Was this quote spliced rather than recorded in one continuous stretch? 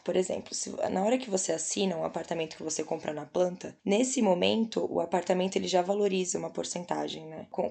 no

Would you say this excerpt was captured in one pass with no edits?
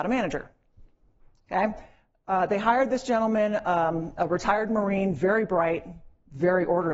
yes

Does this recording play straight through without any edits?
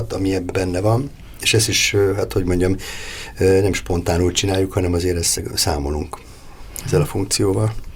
no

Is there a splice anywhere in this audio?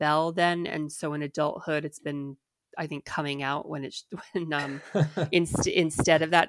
no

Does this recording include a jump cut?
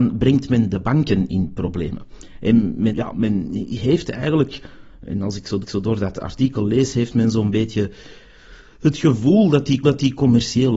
yes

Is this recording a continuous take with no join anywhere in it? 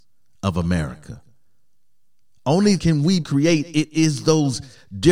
no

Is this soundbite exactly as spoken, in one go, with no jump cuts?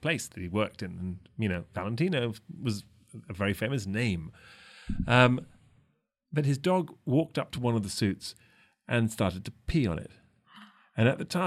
yes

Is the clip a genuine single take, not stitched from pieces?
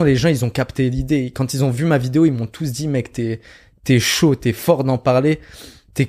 yes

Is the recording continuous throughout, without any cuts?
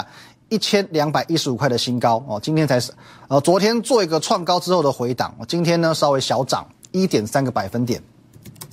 yes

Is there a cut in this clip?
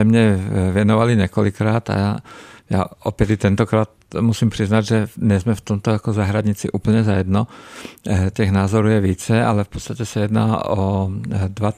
no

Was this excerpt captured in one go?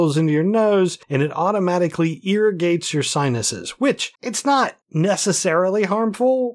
no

